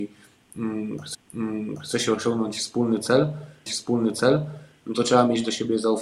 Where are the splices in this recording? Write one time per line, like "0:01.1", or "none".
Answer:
0:01.1
0:03.7